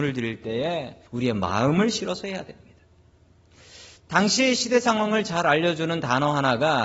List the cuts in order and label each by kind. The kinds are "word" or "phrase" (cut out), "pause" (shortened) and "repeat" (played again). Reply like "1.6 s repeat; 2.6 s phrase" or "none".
1.1 s pause; 4.0 s pause